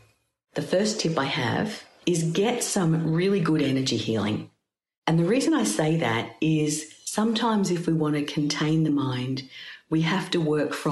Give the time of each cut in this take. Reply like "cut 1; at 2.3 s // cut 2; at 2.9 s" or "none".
none